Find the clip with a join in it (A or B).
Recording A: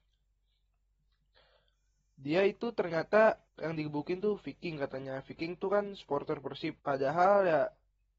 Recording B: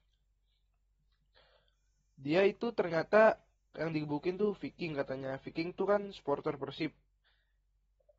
A